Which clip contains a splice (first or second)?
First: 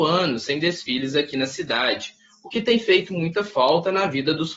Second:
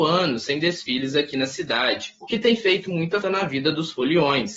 second